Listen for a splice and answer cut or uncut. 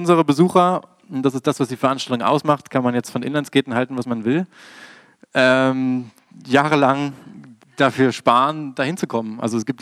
uncut